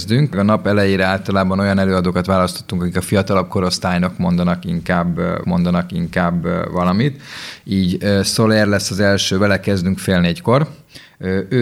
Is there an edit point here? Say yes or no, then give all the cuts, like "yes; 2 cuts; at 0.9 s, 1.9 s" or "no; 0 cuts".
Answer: yes; 1 cut; at 5.4 s